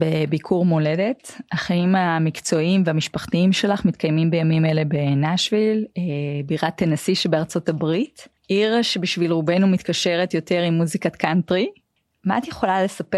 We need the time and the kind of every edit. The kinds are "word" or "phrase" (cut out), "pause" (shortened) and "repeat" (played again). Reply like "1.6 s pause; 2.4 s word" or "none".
8.4 s pause; 12.0 s pause